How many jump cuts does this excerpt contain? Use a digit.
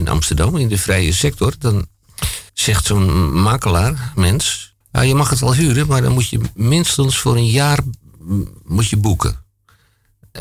2